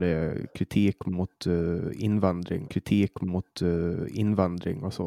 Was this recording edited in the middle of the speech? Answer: yes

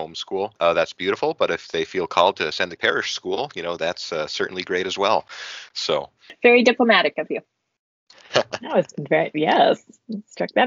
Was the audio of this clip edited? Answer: yes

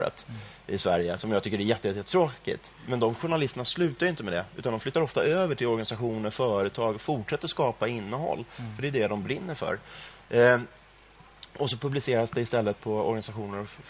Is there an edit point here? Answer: no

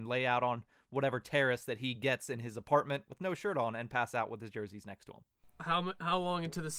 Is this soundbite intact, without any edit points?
yes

